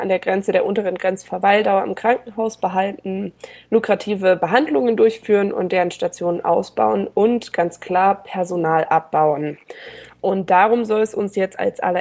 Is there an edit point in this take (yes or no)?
no